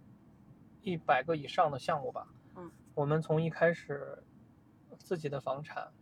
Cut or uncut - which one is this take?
uncut